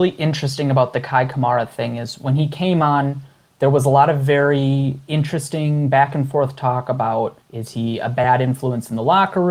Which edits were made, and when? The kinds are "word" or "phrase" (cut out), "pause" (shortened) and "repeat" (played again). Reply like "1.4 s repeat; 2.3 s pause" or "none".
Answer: 7.4 s pause